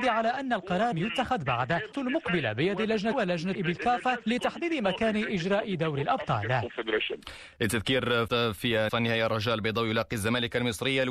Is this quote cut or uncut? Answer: cut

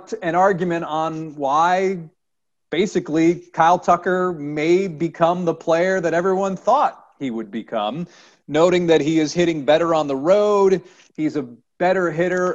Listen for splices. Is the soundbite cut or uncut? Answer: uncut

